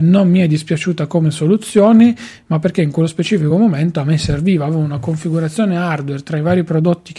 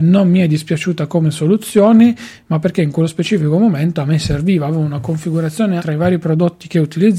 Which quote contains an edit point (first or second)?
second